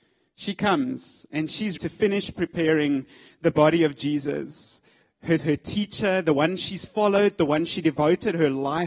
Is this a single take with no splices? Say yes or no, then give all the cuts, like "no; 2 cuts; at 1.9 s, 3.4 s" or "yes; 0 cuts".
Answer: no; 2 cuts; at 1.8 s, 5.4 s